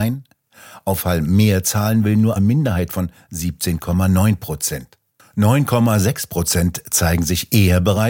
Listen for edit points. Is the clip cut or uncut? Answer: cut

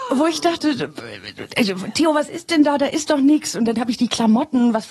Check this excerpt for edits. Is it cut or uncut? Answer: uncut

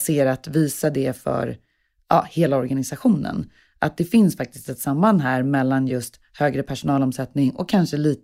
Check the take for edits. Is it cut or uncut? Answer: uncut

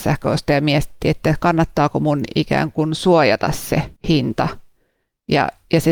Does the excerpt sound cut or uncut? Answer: cut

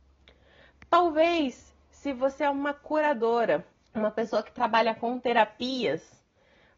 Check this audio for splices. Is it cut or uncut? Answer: cut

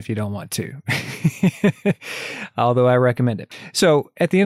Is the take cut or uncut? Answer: uncut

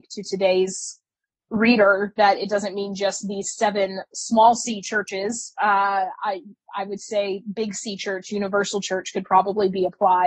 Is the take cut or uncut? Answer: uncut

